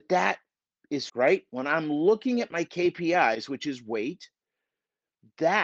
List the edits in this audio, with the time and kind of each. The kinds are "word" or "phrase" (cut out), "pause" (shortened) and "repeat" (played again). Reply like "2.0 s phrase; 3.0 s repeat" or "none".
1.1 s word